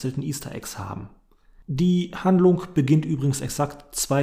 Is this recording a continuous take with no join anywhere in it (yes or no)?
yes